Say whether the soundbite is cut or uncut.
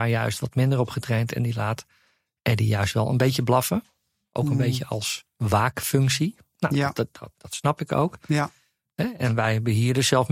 uncut